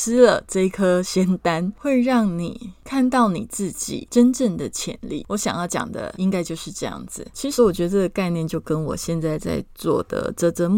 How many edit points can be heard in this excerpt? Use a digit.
1